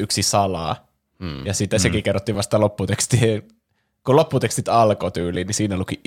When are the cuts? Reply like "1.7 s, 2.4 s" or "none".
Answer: none

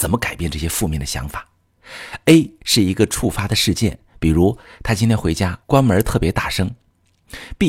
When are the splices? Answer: 5.6 s

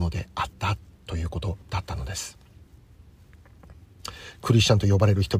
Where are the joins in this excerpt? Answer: 1.6 s

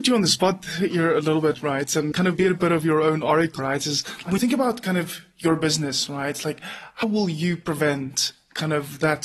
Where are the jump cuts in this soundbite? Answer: 2.1 s, 3.6 s, 4.4 s, 7.0 s

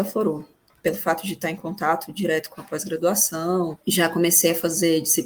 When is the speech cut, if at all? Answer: 3.8 s

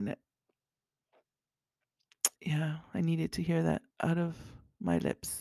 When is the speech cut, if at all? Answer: 2.4 s, 3.9 s

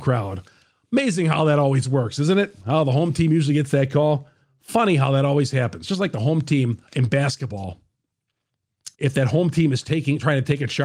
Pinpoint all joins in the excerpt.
6.9 s, 8.9 s

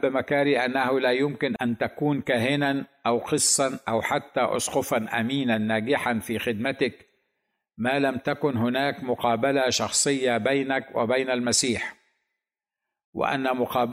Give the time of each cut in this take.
none

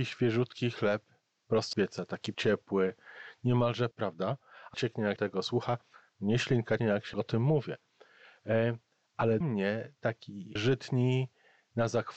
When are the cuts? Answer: 1.7 s, 2.3 s, 3.9 s, 4.7 s, 5.2 s, 6.8 s, 7.1 s, 9.4 s, 10.6 s

